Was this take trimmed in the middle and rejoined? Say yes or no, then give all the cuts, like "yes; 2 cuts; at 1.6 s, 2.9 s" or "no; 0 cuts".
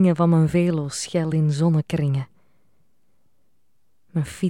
no; 0 cuts